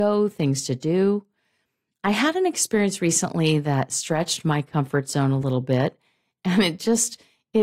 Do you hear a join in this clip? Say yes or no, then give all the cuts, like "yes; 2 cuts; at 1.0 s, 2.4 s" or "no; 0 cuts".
no; 0 cuts